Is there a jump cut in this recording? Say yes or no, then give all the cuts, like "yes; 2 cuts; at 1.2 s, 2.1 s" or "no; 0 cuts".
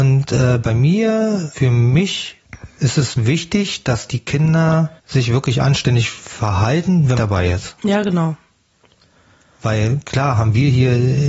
yes; 3 cuts; at 1.5 s, 5.0 s, 7.1 s